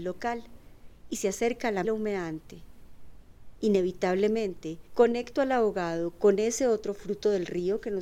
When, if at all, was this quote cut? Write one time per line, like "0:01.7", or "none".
0:01.8